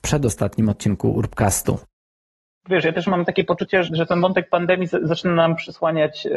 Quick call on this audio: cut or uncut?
cut